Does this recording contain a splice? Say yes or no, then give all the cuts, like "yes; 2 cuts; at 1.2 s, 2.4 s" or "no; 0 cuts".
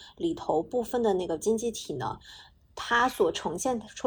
no; 0 cuts